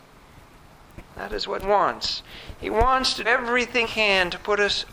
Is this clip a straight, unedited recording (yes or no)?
no